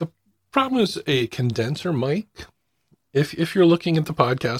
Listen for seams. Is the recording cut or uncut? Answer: uncut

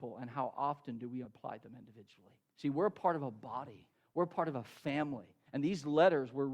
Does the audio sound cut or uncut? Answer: cut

